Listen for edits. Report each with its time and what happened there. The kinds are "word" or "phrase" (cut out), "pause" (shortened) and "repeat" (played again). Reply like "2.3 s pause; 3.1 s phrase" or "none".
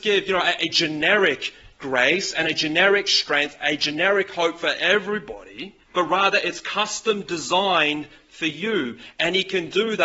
5.8 s pause